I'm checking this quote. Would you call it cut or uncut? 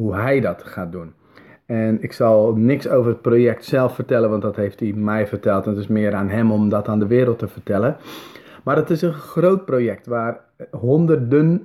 uncut